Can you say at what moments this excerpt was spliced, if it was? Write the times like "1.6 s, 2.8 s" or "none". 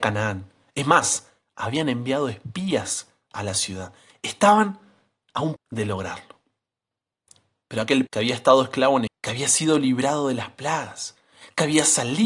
5.6 s, 8.1 s, 9.1 s